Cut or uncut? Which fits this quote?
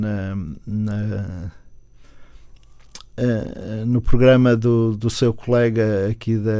uncut